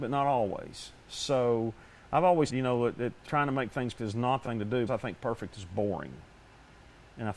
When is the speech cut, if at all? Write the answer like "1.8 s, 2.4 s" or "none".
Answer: 2.5 s, 3.2 s, 4.0 s, 4.4 s, 4.9 s